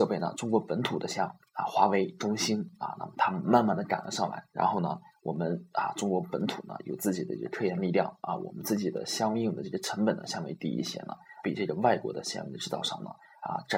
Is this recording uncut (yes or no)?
no